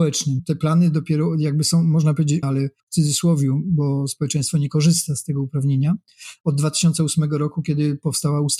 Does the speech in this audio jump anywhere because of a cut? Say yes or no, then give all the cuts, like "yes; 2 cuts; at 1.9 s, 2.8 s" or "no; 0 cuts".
yes; 2 cuts; at 2.4 s, 2.8 s